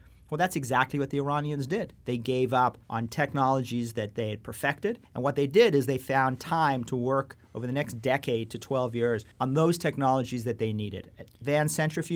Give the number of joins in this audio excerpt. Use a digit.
3